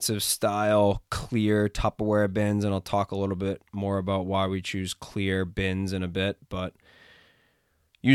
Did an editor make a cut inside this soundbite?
no; 0 cuts

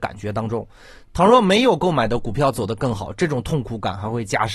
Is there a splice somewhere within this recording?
no; 0 cuts

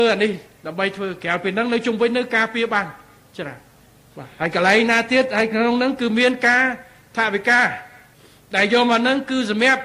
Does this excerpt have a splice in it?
no; 0 cuts

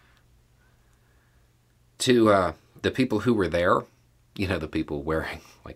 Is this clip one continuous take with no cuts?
yes; 0 cuts

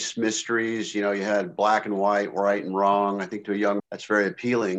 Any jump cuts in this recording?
yes; 1 cut; at 3.8 s

